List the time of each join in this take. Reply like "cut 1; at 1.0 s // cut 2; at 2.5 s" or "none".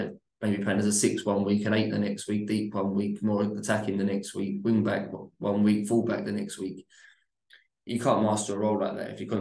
none